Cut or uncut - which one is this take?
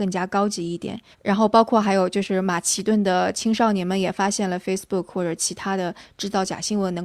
cut